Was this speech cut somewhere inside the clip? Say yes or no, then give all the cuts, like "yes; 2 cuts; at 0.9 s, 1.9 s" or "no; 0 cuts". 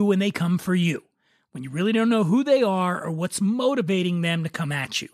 no; 0 cuts